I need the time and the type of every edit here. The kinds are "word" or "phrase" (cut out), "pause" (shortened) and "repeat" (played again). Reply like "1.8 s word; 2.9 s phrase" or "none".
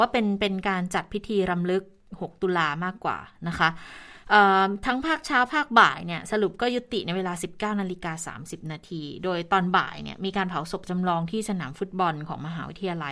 none